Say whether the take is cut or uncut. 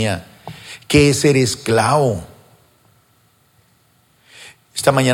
uncut